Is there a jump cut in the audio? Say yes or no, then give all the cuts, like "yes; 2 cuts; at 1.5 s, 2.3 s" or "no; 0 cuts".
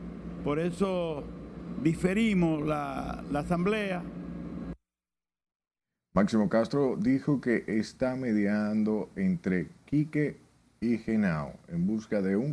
no; 0 cuts